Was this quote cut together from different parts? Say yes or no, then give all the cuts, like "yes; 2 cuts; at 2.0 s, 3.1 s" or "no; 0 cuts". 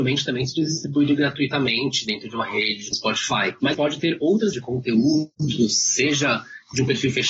yes; 3 cuts; at 2.9 s, 3.7 s, 4.5 s